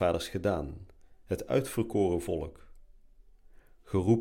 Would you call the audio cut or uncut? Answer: uncut